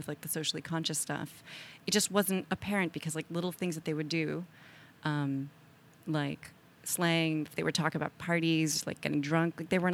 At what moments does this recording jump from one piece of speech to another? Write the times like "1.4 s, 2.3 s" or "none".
none

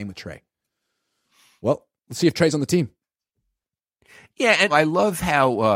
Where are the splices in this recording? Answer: 4.7 s

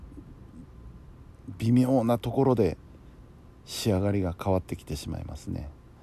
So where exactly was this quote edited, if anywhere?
3.6 s

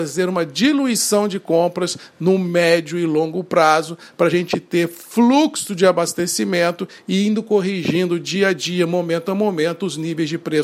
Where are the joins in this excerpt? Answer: none

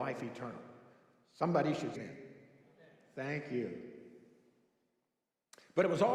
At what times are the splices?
1.9 s

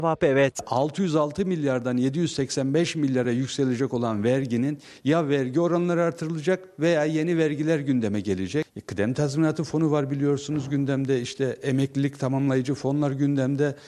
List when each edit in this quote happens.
none

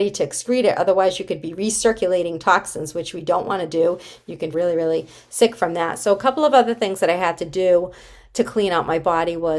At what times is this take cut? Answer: 4.5 s

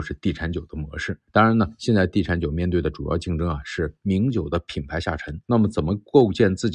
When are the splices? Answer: 1.3 s, 5.4 s

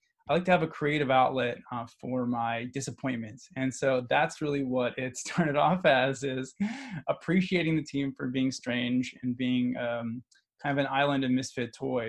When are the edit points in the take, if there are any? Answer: none

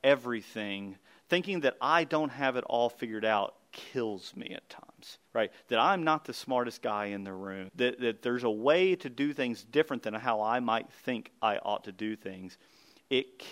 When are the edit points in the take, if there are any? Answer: 5.3 s, 7.7 s

